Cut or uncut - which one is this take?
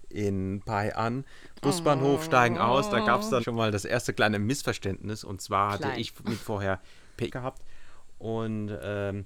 cut